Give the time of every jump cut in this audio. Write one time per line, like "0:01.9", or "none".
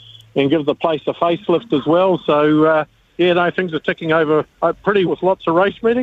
0:05.1